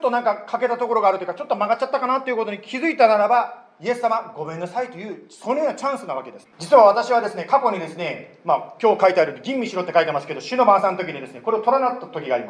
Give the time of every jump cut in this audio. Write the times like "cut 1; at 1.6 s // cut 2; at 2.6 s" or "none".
cut 1; at 6.5 s